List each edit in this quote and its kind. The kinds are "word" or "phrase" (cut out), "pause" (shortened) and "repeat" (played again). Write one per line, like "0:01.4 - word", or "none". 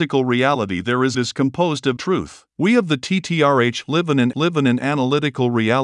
0:01.1 - phrase
0:02.0 - word
0:02.5 - pause
0:04.3 - repeat